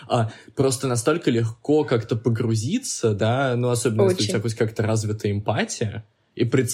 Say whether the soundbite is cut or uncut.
uncut